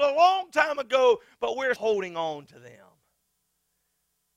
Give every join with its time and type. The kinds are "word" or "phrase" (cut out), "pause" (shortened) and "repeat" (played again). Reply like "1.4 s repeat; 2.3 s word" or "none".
1.8 s word